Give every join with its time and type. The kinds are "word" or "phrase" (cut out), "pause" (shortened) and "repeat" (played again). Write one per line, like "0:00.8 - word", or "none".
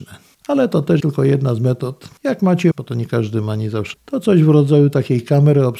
0:01.0 - word
0:02.7 - word
0:03.9 - word